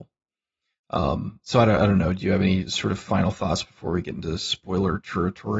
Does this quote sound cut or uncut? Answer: uncut